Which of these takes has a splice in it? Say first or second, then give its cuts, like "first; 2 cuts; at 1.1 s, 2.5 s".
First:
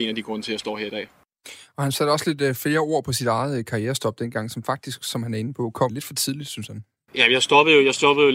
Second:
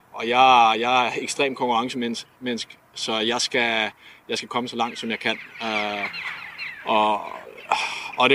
first; 1 cut; at 5.9 s